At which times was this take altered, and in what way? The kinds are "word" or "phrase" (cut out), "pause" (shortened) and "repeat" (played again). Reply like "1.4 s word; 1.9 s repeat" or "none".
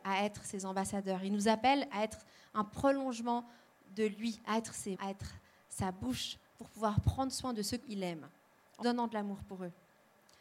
4.9 s word; 7.8 s word; 8.8 s word